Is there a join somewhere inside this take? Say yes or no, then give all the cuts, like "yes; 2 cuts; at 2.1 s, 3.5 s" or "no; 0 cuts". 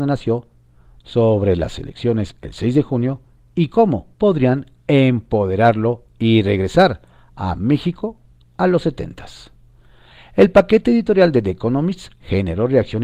yes; 1 cut; at 4.1 s